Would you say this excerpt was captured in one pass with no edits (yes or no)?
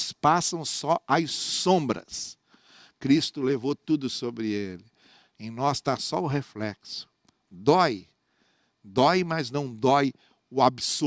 yes